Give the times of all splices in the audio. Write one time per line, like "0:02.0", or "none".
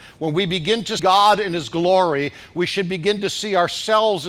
0:01.0